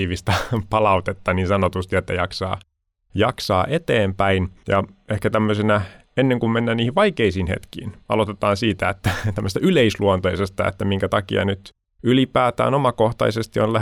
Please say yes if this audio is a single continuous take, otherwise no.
yes